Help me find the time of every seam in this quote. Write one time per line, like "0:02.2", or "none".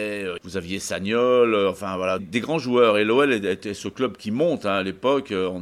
0:02.2